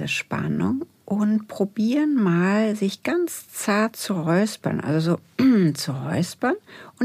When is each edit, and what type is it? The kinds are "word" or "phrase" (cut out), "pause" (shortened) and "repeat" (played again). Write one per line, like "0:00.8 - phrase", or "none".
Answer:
none